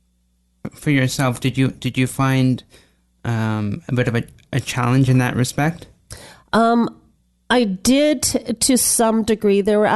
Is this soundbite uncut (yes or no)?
yes